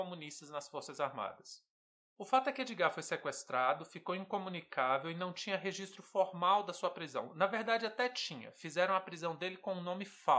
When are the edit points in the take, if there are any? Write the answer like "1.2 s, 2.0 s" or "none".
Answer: none